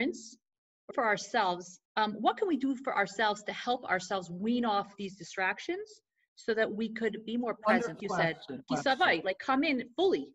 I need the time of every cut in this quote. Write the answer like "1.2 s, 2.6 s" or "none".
0.9 s, 1.8 s, 8.0 s, 8.7 s